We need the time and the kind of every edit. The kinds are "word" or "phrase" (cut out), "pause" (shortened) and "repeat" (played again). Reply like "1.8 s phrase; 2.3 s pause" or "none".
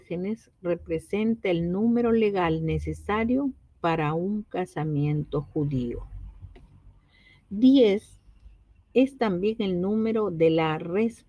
none